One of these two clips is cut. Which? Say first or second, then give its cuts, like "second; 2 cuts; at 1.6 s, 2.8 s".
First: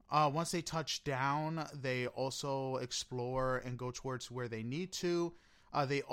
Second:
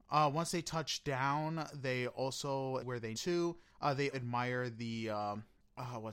second; 4 cuts; at 2.8 s, 3.1 s, 3.7 s, 4.1 s